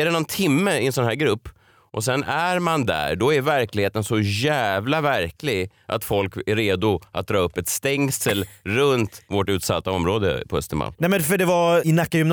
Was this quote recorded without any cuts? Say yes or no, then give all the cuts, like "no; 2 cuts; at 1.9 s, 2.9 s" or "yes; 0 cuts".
yes; 0 cuts